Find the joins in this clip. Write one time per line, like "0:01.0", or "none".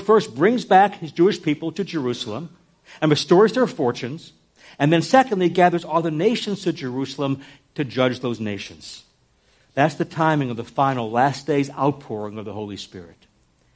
none